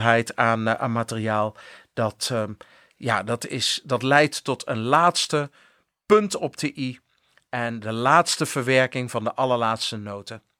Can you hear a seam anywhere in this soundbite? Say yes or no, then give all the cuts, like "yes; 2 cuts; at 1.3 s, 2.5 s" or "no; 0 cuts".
no; 0 cuts